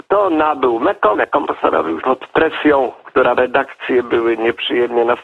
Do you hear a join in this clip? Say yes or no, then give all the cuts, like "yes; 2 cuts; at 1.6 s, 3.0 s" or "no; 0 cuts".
yes; 3 cuts; at 1.1 s, 2.0 s, 3.4 s